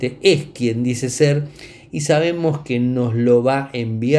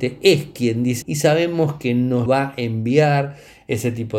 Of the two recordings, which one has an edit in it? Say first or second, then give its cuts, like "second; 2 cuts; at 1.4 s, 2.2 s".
second; 2 cuts; at 1.0 s, 2.3 s